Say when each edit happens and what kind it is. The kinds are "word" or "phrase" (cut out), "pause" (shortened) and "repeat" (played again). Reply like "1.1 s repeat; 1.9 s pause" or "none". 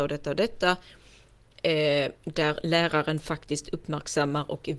none